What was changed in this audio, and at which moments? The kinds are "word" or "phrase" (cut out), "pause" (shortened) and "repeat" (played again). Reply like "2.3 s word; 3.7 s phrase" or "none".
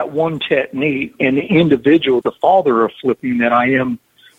2.2 s word